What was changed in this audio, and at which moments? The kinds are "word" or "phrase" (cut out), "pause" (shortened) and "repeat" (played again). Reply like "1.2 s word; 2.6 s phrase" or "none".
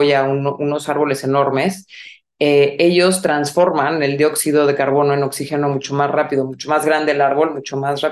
none